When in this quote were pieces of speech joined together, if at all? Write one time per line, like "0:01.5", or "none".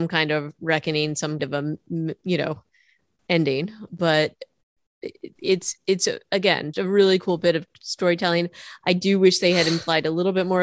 0:01.4
0:03.9
0:06.7